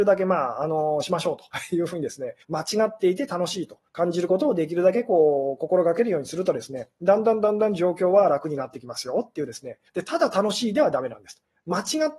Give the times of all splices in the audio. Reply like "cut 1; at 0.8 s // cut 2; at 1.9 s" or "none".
cut 1; at 2.4 s // cut 2; at 3.9 s // cut 3; at 9.9 s